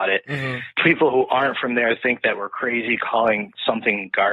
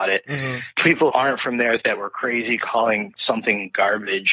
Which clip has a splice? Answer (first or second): second